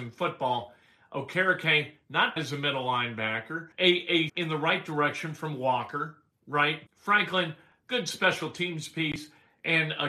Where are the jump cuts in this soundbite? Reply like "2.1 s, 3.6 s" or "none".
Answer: 2.4 s, 3.7 s, 4.3 s, 6.9 s